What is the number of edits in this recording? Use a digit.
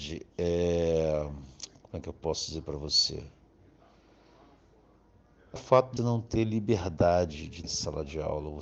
3